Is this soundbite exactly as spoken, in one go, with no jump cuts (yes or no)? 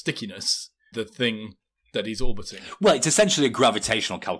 no